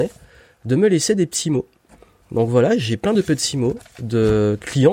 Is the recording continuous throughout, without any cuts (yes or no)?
yes